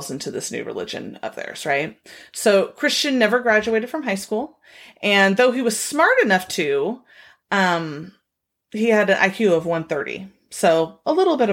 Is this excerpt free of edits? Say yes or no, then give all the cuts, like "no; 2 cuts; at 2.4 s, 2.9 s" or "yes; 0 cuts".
yes; 0 cuts